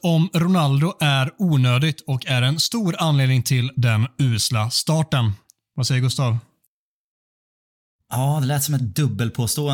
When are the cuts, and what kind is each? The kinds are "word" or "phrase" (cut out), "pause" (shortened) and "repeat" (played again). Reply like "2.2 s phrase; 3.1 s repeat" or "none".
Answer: none